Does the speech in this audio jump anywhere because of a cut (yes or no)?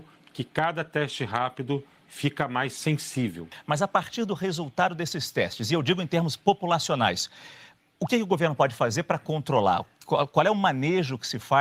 no